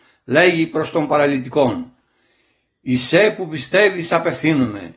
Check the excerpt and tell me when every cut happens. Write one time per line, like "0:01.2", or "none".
none